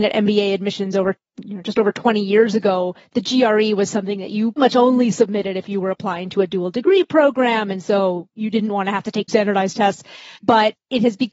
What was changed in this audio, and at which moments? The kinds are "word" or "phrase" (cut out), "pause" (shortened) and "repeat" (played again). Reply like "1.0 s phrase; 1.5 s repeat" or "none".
4.6 s word; 9.3 s word; 10.3 s pause